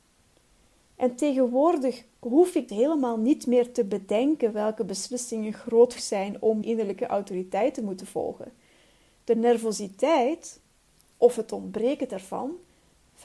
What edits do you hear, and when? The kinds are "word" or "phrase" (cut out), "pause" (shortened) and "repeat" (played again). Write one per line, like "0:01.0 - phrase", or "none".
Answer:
0:02.7 - word
0:06.0 - word
0:06.6 - word